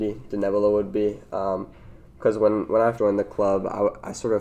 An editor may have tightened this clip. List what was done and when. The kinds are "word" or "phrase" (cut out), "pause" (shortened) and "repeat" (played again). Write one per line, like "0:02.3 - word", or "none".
0:03.0 - word